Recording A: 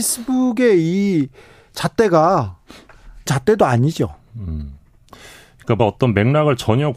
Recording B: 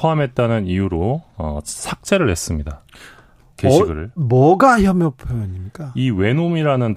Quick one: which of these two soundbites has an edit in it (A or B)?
A